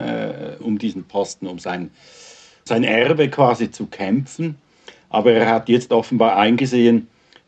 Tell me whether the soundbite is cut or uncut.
uncut